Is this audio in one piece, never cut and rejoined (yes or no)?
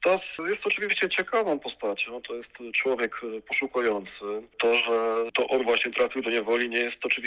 yes